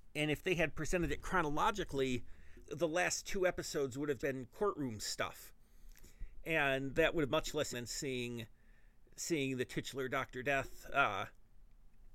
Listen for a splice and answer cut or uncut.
cut